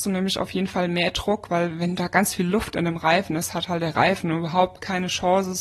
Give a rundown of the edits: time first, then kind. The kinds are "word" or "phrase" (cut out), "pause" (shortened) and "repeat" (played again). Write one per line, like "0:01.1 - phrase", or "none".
none